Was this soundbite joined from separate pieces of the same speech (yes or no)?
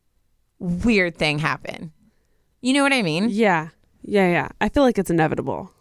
no